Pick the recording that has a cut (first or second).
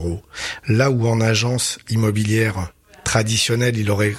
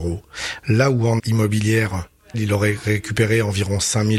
second